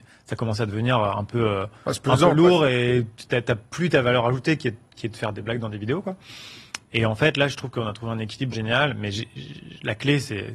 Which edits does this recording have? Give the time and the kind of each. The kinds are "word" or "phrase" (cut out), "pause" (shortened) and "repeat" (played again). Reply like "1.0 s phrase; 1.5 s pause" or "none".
8.5 s word